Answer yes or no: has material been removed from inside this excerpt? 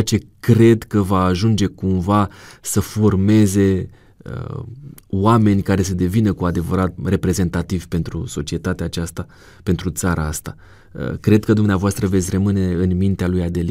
yes